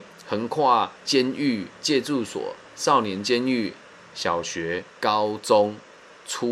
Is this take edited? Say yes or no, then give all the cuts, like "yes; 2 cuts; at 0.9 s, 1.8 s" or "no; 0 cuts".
yes; 3 cuts; at 1.0 s, 1.8 s, 4.9 s